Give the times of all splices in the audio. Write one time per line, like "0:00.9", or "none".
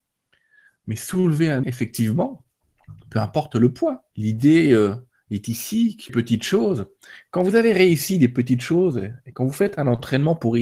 0:01.6
0:04.1
0:06.1